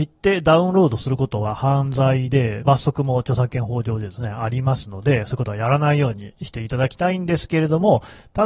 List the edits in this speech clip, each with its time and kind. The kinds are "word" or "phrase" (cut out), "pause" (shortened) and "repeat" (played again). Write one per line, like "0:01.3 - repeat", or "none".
0:02.6 - phrase